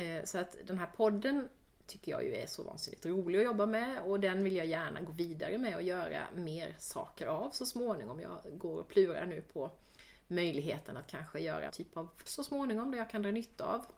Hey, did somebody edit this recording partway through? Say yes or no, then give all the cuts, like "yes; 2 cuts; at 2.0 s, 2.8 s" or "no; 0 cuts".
yes; 2 cuts; at 11.7 s, 12.3 s